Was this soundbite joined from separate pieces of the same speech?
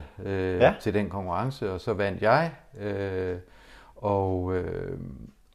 no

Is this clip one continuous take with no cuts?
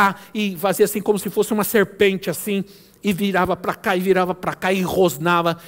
yes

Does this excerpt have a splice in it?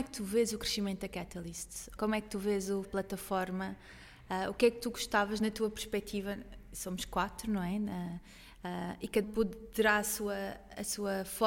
yes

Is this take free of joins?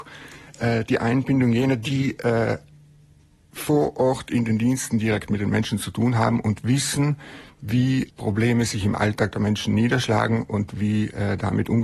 no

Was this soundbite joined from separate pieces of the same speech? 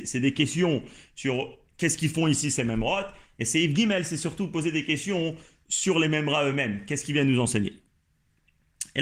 no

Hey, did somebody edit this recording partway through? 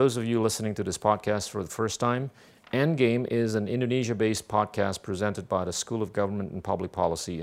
no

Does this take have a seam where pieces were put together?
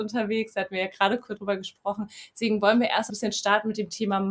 yes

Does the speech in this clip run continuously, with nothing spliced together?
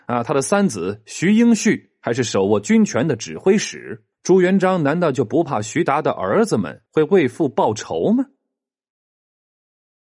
no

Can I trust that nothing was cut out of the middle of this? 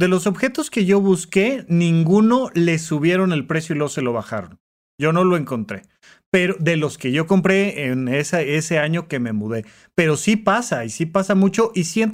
yes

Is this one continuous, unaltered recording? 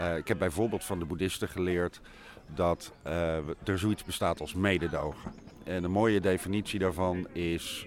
yes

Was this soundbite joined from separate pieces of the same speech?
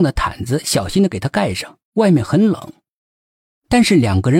yes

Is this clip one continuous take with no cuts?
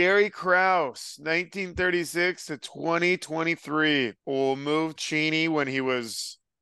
no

